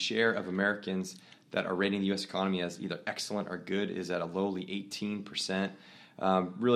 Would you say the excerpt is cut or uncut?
uncut